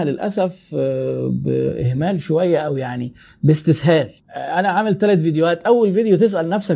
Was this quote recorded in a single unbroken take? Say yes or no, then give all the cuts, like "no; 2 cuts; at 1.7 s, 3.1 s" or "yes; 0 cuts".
yes; 0 cuts